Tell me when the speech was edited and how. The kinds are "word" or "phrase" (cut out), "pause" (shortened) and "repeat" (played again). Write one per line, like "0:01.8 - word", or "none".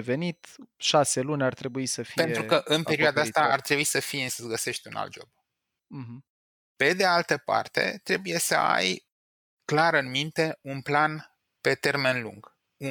0:04.3 - word